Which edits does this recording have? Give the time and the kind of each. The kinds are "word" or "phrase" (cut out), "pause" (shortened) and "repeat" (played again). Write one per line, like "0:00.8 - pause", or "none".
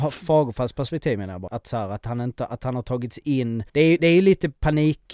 0:01.5 - word
0:03.7 - pause